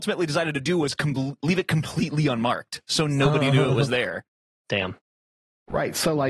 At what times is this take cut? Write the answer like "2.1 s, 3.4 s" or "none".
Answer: none